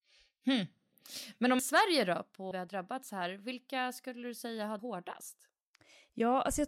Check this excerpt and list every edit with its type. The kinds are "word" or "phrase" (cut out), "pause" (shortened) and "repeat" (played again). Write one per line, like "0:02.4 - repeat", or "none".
0:01.6 - phrase
0:02.5 - word
0:04.8 - word